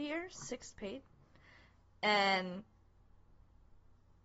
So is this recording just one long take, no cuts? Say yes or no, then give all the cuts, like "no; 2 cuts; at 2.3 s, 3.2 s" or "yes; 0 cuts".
yes; 0 cuts